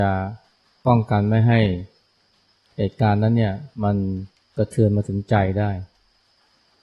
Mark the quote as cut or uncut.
cut